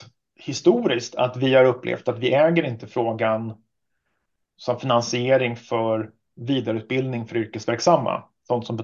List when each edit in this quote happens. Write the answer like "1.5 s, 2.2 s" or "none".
none